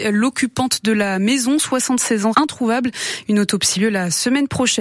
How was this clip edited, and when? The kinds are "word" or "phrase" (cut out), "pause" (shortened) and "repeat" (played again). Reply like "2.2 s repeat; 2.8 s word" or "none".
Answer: 2.3 s word; 3.8 s word